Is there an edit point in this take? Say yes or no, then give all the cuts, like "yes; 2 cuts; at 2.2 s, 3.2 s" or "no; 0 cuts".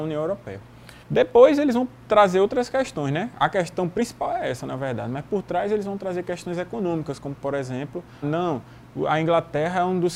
yes; 2 cuts; at 1.0 s, 8.2 s